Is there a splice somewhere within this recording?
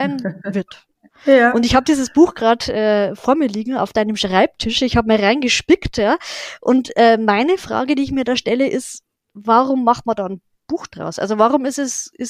no; 0 cuts

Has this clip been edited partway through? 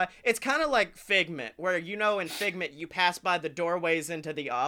no; 0 cuts

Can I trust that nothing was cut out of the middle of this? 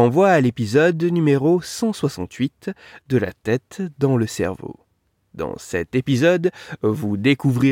yes; 0 cuts

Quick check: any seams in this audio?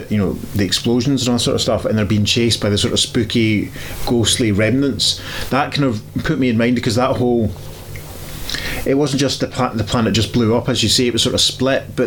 no; 0 cuts

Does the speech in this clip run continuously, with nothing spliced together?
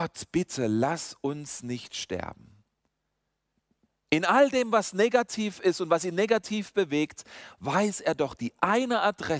yes; 0 cuts

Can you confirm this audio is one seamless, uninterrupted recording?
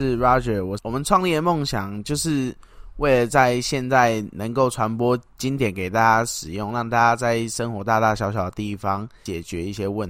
no; 1 cut; at 5.3 s

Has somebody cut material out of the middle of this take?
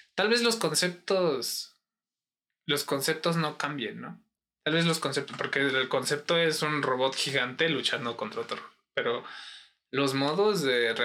no; 0 cuts

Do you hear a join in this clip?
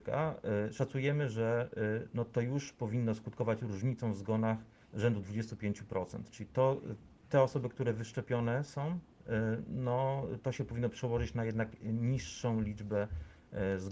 yes; 1 cut; at 4.8 s

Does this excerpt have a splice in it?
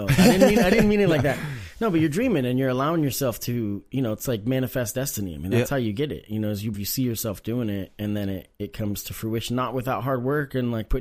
yes; 1 cut; at 6.7 s

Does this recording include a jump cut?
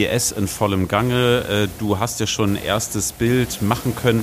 no; 0 cuts

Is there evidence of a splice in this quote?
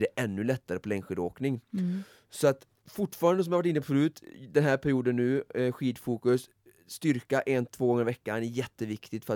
yes; 1 cut; at 2.8 s

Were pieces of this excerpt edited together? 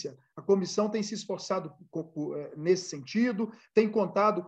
no; 0 cuts

